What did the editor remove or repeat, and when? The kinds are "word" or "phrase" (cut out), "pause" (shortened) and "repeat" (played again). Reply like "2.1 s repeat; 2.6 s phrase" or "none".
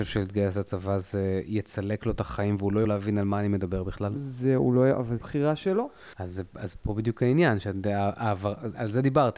2.8 s word; 5.2 s phrase; 6.1 s pause